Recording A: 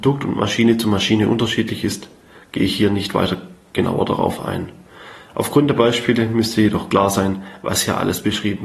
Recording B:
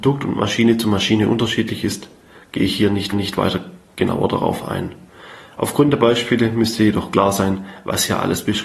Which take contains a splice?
B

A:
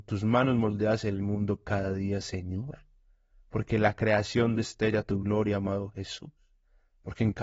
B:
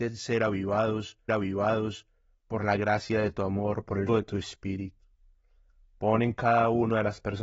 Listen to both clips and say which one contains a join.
B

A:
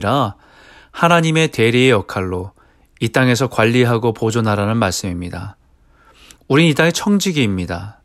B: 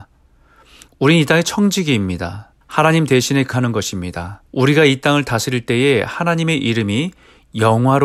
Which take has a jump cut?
B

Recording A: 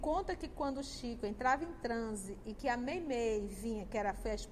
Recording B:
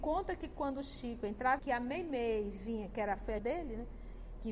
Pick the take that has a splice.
B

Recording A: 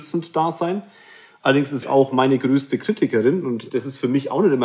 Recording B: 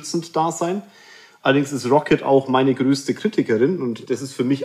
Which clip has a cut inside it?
A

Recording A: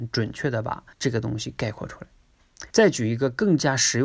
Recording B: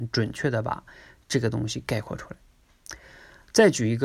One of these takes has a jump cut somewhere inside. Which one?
A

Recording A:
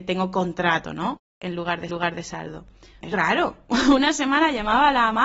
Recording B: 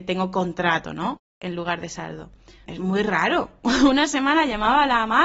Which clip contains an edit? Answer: A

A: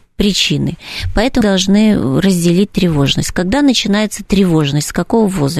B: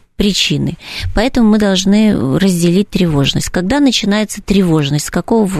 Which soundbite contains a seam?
A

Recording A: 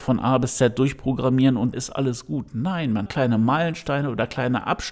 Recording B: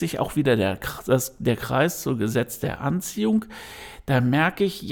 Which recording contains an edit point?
A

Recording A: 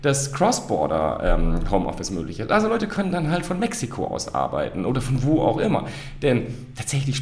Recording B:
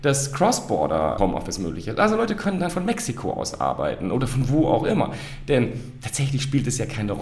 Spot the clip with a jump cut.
B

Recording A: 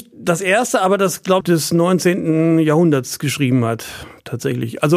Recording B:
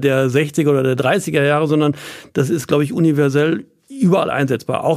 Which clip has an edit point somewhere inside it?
A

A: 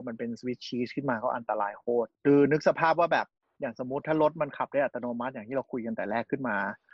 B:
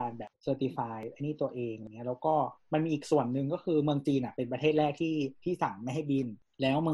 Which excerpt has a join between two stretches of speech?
A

